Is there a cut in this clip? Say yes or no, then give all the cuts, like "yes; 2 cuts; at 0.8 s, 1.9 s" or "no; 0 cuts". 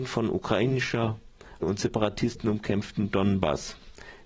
yes; 1 cut; at 1.6 s